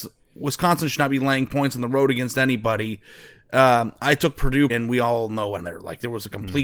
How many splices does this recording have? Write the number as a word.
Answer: two